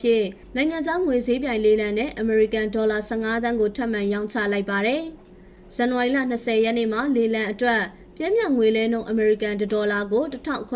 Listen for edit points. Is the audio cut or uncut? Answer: cut